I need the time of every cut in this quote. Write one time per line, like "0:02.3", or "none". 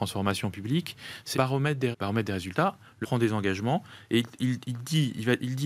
0:01.3
0:01.9
0:03.0